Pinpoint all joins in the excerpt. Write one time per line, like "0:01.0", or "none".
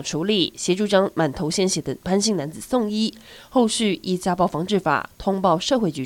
none